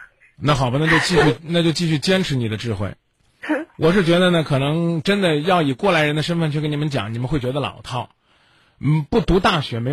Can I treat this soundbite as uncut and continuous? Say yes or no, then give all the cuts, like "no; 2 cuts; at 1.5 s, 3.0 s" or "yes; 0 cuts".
yes; 0 cuts